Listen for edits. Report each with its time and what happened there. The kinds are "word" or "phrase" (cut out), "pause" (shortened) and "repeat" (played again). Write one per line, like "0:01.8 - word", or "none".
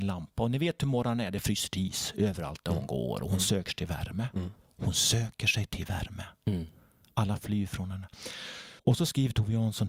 0:08.8 - pause